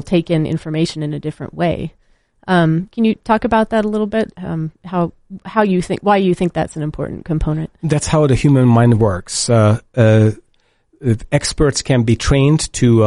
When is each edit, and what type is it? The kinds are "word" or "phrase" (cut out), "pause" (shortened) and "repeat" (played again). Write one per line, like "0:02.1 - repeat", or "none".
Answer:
none